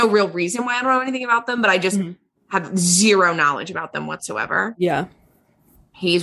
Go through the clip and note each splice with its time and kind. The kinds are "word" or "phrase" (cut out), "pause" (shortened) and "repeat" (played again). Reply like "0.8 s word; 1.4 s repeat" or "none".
none